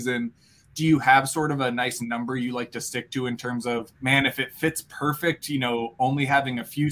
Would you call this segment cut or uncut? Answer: cut